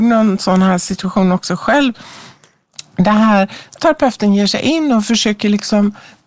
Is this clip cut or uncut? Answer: cut